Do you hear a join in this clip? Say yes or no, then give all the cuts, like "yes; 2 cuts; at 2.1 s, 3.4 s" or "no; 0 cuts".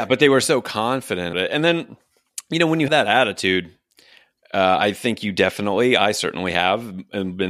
yes; 2 cuts; at 1.3 s, 2.9 s